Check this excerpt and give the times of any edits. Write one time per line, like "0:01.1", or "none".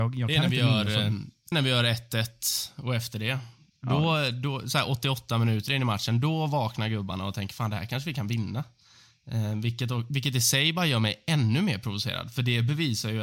0:01.5